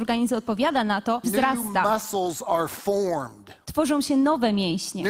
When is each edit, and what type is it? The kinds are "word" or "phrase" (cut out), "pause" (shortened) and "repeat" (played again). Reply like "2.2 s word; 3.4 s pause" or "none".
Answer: 1.2 s phrase